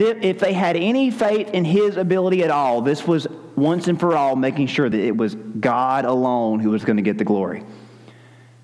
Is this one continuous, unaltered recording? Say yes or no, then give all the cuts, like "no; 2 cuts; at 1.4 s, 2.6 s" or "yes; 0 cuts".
yes; 0 cuts